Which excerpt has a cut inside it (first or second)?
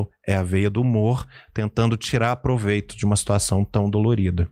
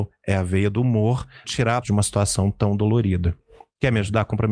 second